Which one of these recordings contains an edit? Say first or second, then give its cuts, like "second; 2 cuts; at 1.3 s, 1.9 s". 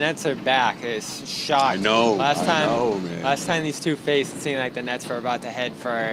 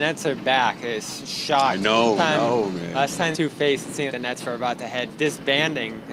second; 4 cuts; at 2.2 s, 3.3 s, 4.1 s, 5.1 s